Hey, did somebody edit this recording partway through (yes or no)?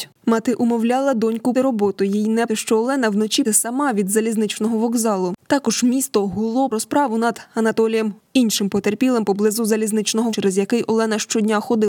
yes